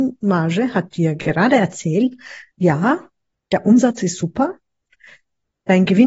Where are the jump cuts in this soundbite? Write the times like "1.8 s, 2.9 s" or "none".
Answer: 2.5 s